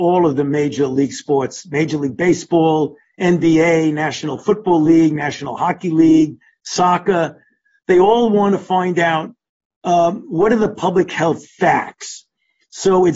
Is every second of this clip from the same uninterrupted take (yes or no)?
yes